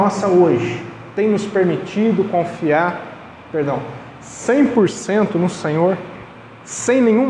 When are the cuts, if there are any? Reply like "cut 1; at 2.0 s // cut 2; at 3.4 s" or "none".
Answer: none